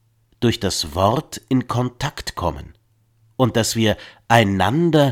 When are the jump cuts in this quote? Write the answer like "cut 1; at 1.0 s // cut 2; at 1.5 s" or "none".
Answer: none

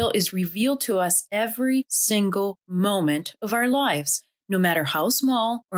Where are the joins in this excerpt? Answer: none

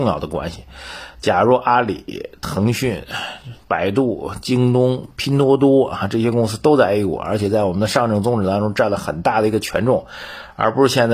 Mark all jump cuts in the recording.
cut 1; at 3.6 s

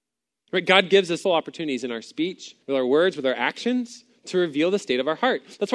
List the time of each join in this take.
cut 1; at 1.2 s // cut 2; at 2.6 s

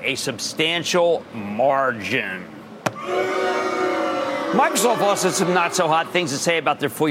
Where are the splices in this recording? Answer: none

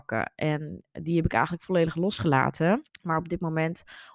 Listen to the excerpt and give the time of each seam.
cut 1; at 2.9 s

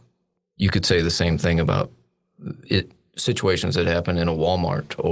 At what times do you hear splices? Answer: none

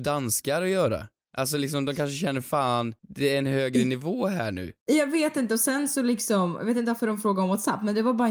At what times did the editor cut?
cut 1; at 3.0 s // cut 2; at 4.8 s

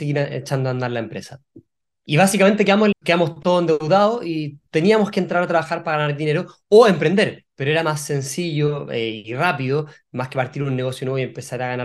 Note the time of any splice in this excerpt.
cut 1; at 2.9 s

